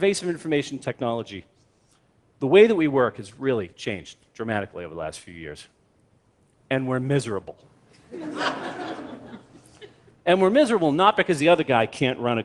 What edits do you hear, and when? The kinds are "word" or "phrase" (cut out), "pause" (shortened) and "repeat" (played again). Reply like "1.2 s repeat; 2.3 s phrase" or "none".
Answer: none